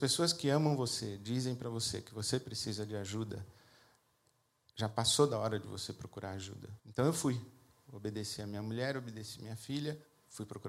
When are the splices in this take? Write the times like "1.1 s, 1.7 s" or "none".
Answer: 6.8 s